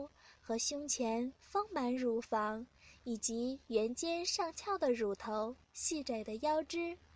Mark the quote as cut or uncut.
uncut